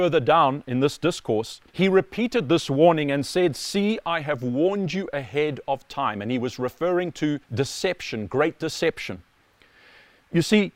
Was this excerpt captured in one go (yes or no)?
no